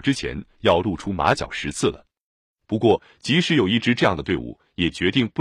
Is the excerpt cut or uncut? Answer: uncut